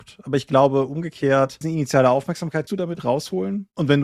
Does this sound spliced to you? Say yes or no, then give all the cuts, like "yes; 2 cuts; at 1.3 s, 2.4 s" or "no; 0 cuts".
yes; 2 cuts; at 1.6 s, 2.7 s